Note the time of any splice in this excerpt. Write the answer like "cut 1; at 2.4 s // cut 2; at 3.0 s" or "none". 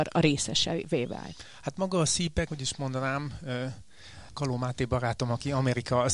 cut 1; at 2.5 s // cut 2; at 4.3 s